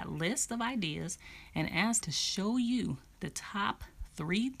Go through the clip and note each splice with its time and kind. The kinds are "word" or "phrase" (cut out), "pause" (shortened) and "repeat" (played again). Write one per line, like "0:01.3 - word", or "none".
0:02.0 - word